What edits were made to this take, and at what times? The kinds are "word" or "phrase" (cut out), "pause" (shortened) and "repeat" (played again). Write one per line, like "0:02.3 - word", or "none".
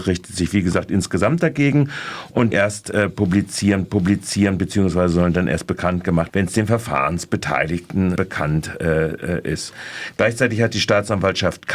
0:02.5 - phrase
0:03.8 - repeat
0:06.3 - word
0:08.2 - word